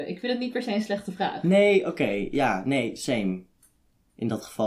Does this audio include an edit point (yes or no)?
no